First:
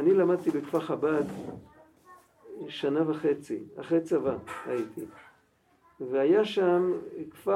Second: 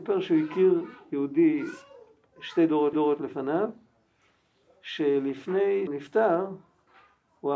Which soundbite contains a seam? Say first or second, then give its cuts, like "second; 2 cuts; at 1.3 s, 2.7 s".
second; 2 cuts; at 2.9 s, 5.9 s